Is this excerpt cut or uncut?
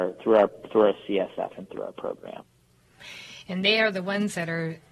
uncut